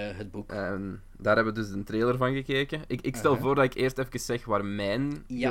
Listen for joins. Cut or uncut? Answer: uncut